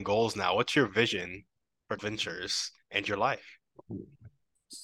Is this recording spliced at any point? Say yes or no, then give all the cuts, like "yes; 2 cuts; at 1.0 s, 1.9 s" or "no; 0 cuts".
yes; 1 cut; at 2.0 s